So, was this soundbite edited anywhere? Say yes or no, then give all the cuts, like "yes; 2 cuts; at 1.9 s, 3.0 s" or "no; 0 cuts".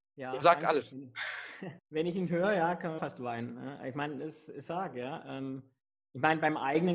yes; 3 cuts; at 1.8 s, 3.0 s, 4.7 s